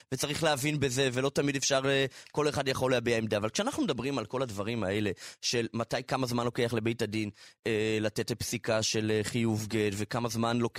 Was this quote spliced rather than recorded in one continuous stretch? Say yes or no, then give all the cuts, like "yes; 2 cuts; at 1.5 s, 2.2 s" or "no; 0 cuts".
no; 0 cuts